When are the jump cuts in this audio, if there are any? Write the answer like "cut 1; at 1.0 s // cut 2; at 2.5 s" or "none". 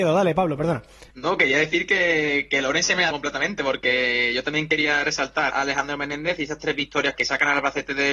cut 1; at 1.1 s // cut 2; at 3.1 s // cut 3; at 5.5 s // cut 4; at 7.1 s